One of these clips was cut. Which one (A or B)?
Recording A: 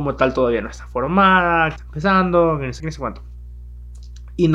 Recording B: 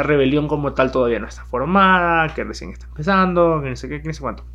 A